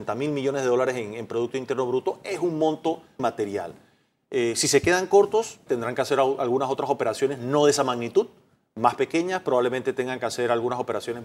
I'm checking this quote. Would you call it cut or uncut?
cut